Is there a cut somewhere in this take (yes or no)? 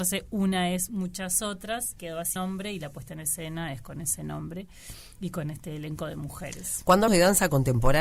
yes